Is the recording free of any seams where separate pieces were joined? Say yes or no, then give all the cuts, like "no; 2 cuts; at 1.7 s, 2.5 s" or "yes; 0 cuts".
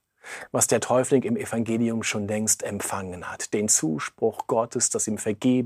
yes; 0 cuts